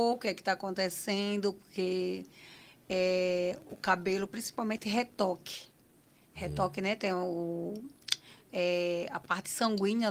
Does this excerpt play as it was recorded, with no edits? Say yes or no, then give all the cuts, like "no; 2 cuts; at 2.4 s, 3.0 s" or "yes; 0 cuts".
yes; 0 cuts